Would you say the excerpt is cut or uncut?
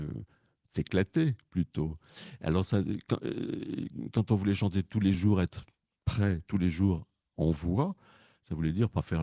uncut